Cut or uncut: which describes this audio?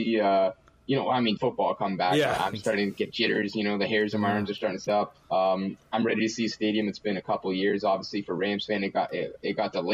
cut